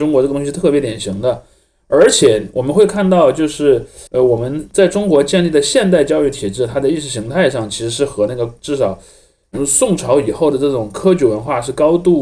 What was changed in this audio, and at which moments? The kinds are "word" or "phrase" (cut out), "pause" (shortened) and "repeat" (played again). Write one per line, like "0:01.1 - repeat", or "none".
0:04.1 - pause